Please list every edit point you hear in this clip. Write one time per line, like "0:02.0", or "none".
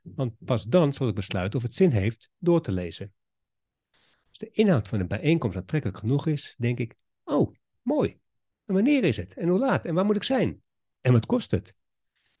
none